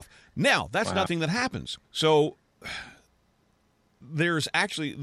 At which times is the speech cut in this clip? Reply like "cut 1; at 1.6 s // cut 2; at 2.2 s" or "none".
cut 1; at 1.1 s // cut 2; at 1.8 s